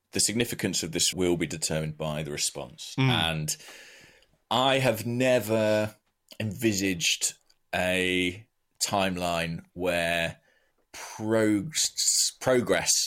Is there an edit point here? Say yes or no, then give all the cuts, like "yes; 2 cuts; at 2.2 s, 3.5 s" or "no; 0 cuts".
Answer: yes; 2 cuts; at 1.1 s, 10.8 s